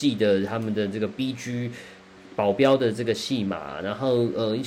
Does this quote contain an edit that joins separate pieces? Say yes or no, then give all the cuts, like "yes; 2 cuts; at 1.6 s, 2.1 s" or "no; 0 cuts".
no; 0 cuts